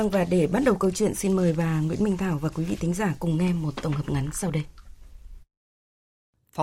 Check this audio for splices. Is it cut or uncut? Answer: uncut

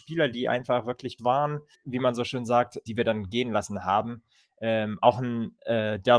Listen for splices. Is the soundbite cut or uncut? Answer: cut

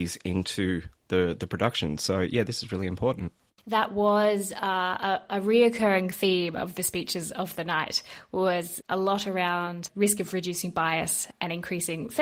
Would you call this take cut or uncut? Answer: uncut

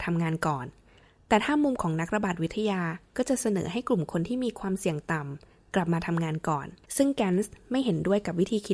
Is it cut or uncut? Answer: cut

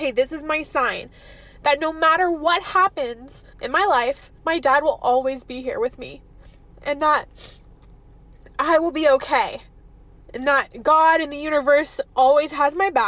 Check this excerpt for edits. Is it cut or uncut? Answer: cut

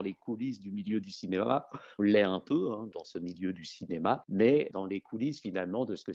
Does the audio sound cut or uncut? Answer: cut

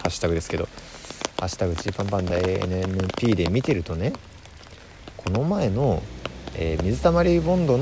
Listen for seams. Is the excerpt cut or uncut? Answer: uncut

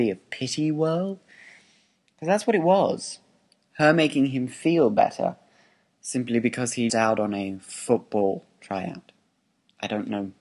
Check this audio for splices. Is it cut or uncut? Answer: cut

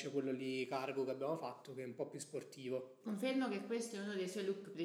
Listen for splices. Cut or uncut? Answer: cut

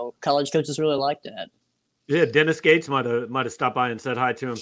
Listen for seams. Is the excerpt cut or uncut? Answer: uncut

